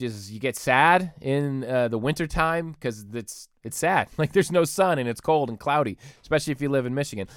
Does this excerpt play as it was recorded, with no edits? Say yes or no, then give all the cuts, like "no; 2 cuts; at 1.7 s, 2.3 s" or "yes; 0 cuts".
no; 1 cut; at 3.6 s